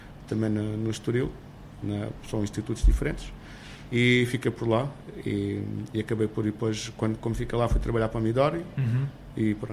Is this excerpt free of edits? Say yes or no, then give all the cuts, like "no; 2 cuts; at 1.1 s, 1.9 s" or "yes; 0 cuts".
yes; 0 cuts